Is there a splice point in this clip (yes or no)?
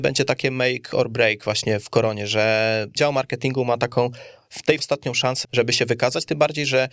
yes